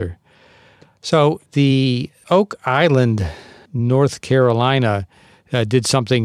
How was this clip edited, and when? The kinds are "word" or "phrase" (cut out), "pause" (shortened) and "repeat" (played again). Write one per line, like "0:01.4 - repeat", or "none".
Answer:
0:01.5 - pause